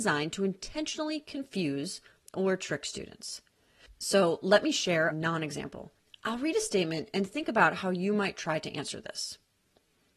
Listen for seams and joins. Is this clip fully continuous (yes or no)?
no